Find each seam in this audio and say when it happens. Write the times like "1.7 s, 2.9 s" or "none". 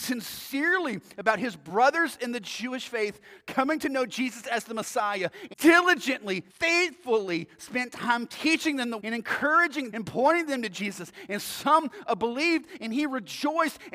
5.5 s, 6.5 s, 9.0 s, 9.9 s